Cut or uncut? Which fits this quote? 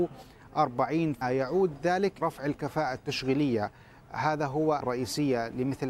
cut